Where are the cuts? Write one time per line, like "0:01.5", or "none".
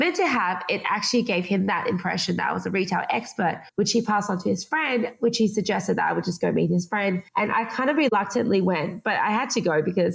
0:03.7
0:07.3